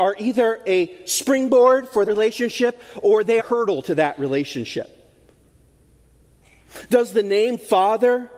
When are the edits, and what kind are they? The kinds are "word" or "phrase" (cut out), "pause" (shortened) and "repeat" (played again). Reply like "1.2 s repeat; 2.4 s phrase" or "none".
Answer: 2.0 s word; 3.4 s word